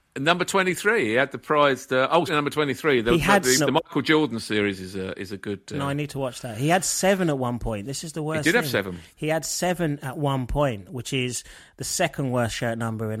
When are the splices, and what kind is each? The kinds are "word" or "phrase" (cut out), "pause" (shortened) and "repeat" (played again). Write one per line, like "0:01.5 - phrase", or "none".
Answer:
0:02.3 - word
0:03.6 - word